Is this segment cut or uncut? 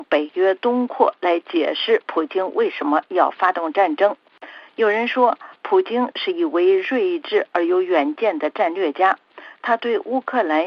uncut